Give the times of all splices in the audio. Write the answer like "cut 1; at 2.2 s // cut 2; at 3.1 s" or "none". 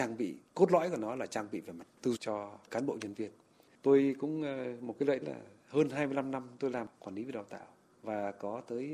cut 1; at 2.2 s // cut 2; at 5.2 s